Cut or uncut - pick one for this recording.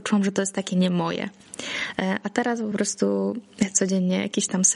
uncut